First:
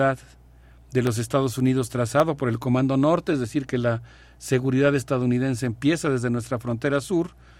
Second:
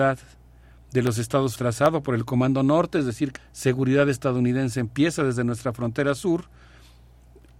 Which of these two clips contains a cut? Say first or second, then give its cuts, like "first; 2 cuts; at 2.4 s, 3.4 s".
second; 2 cuts; at 1.6 s, 3.4 s